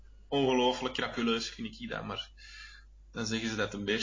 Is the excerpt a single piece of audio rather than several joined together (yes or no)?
yes